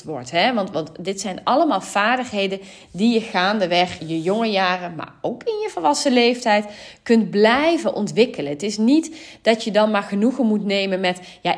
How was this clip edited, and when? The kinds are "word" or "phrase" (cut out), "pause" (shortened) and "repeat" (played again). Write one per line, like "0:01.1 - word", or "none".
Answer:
0:04.0 - word